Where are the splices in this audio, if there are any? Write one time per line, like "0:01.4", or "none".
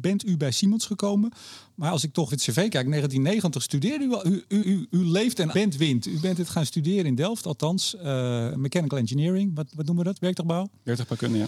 0:02.3
0:04.6
0:05.5